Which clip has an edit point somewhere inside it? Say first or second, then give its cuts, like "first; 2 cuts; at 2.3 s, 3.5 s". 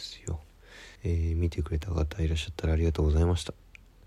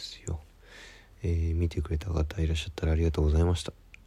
first; 1 cut; at 1.0 s